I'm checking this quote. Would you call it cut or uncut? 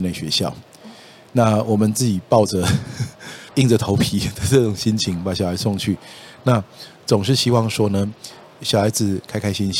uncut